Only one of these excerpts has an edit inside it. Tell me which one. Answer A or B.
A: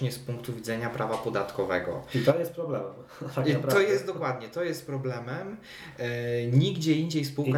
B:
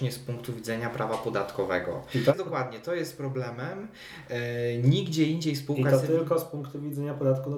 B